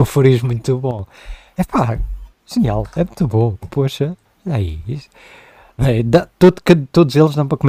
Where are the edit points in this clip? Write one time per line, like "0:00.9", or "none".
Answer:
0:02.3
0:04.3